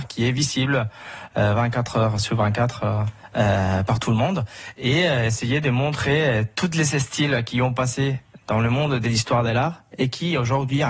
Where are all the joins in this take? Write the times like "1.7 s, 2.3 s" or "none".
none

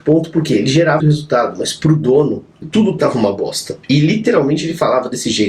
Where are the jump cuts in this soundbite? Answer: 1.0 s, 2.6 s, 3.8 s

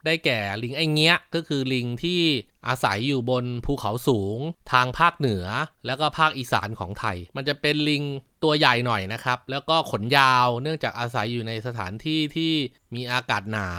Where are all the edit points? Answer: 7.3 s

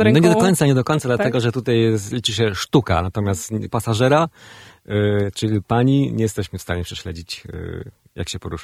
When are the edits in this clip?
3.7 s

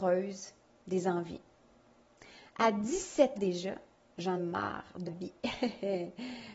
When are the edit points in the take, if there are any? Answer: 3.4 s, 4.4 s, 5.1 s

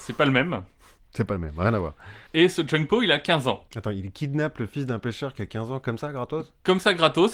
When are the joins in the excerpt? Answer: 2.3 s, 3.7 s

